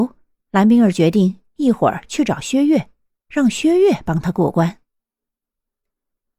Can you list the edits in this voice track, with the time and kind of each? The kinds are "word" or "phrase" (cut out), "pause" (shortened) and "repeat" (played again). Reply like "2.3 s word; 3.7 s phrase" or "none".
none